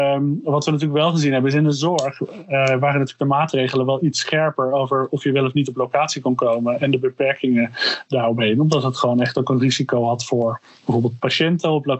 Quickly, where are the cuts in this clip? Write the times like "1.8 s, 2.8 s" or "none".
none